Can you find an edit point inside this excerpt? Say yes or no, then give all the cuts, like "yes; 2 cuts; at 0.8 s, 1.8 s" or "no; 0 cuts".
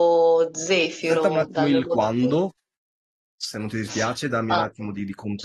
no; 0 cuts